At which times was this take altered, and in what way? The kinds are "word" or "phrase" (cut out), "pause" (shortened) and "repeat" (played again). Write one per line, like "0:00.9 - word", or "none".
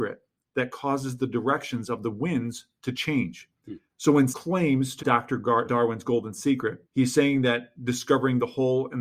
0:03.9 - pause
0:04.3 - word
0:05.0 - word
0:05.6 - word
0:06.9 - pause

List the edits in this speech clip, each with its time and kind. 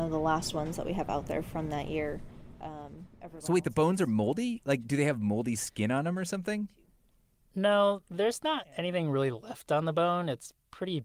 none

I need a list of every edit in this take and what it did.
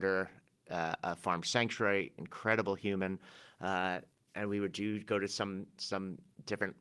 0:04.1 - pause

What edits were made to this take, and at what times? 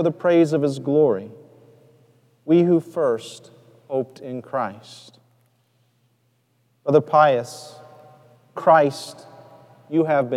0:08.6 - word

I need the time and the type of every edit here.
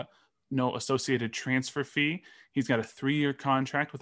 none

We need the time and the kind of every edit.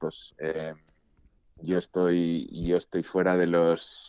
none

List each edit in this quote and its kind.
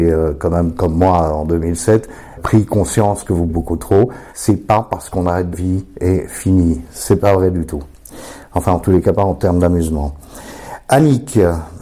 0:02.4 - word
0:03.5 - word
0:04.3 - pause
0:05.5 - phrase

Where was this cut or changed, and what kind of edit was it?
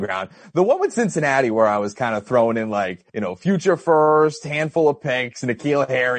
0:03.1 - pause

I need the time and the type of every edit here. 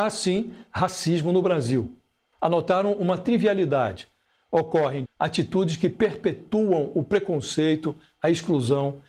0:05.0 - word

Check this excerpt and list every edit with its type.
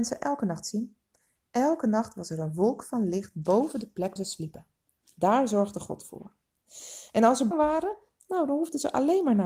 0:04.2 - word
0:07.5 - word

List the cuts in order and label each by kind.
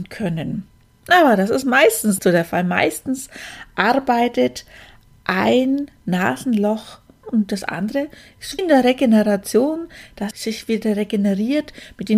0:02.2 - word
0:07.2 - word
0:08.6 - word
0:10.3 - word

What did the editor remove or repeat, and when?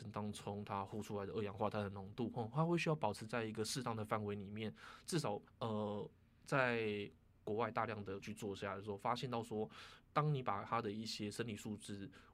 0:05.5 - pause
0:08.2 - word

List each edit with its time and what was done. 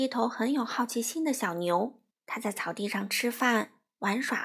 0:02.1 - pause

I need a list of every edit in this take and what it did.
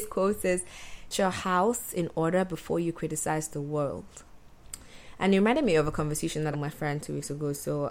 0:01.1 - word
0:06.5 - phrase

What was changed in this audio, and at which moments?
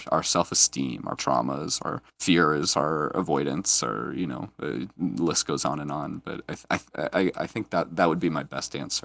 0:01.2 - word
0:02.1 - pause

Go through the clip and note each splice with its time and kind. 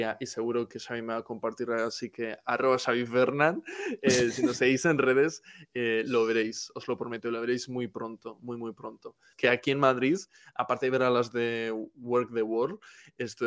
none

